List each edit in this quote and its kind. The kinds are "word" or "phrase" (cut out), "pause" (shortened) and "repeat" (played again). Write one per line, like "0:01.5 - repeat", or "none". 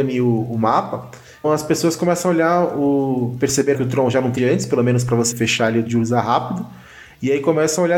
0:01.4 - word
0:03.7 - word
0:04.4 - phrase
0:05.3 - word
0:05.9 - word